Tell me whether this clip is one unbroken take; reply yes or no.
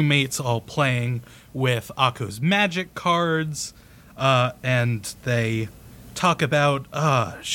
yes